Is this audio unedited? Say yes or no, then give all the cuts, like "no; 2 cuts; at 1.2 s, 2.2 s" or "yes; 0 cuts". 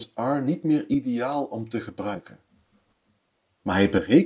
yes; 0 cuts